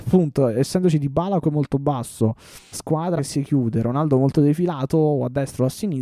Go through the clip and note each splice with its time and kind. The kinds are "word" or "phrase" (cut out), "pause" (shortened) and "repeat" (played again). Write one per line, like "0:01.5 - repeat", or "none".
0:01.4 - word
0:02.7 - word
0:03.2 - word